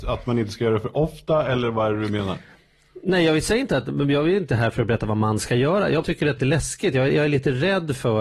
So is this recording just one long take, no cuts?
no; 2 cuts; at 6.0 s, 6.4 s

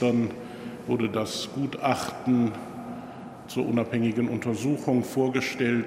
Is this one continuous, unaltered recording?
yes; 0 cuts

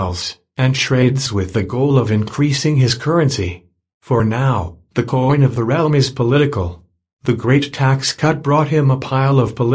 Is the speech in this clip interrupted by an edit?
no; 0 cuts

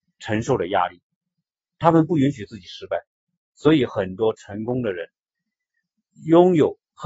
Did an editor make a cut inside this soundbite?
yes; 1 cut; at 1.3 s

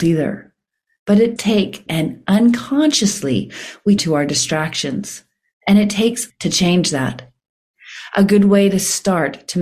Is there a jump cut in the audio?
yes; 4 cuts; at 1.4 s, 1.9 s, 4.0 s, 6.3 s

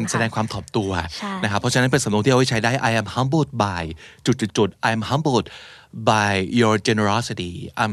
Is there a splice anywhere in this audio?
no; 0 cuts

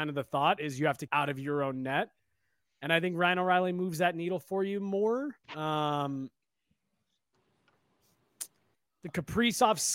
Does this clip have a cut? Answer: yes; 2 cuts; at 1.1 s, 5.4 s

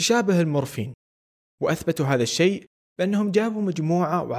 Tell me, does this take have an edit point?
no; 0 cuts

